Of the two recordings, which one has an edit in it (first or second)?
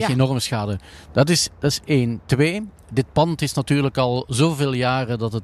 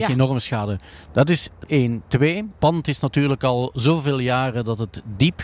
second